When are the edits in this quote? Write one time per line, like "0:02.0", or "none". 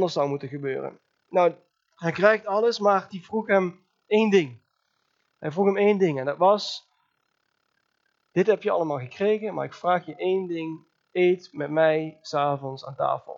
0:03.1